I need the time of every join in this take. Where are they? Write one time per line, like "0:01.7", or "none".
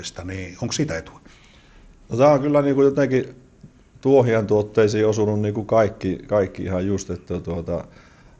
none